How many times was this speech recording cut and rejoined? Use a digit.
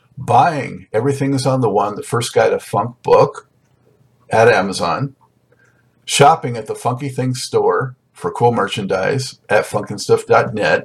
0